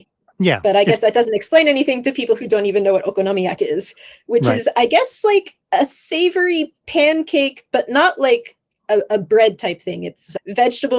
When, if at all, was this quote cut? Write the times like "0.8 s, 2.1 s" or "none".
none